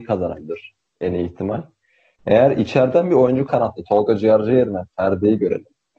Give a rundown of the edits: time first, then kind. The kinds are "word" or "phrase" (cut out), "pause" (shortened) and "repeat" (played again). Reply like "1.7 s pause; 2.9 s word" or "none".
3.5 s phrase